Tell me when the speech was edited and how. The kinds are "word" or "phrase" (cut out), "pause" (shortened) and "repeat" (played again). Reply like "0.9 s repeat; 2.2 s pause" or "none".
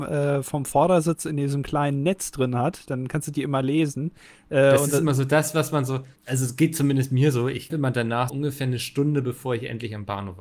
6.2 s pause; 7.7 s word; 8.3 s word